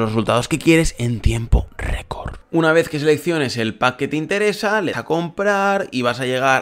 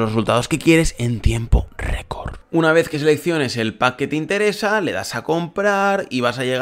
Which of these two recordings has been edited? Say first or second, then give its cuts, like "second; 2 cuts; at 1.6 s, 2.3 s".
first; 1 cut; at 4.9 s